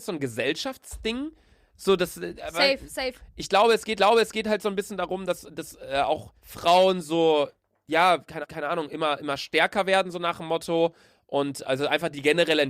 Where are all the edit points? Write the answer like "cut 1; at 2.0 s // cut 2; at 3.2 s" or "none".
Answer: cut 1; at 4.0 s // cut 2; at 6.4 s // cut 3; at 8.4 s